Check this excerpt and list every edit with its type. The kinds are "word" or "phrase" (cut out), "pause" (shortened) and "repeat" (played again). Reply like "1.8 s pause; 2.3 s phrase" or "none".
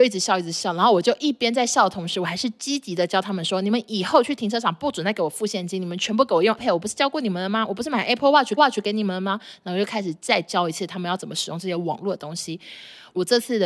6.6 s word; 8.6 s repeat